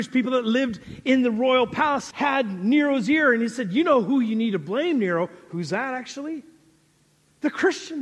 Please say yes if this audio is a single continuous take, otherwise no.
no